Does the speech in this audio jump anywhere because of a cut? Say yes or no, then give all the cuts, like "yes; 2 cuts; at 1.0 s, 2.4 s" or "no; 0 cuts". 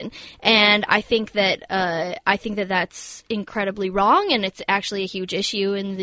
no; 0 cuts